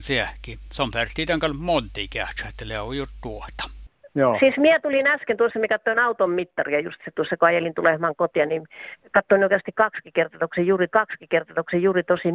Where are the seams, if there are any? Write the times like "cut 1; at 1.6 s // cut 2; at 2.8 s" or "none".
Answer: cut 1; at 10.9 s